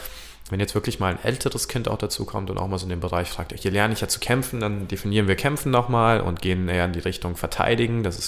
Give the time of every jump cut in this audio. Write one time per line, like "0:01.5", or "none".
0:03.5